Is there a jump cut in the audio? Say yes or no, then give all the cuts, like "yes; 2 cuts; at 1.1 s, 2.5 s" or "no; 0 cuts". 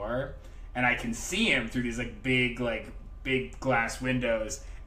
no; 0 cuts